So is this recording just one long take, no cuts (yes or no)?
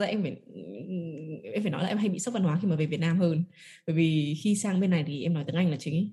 yes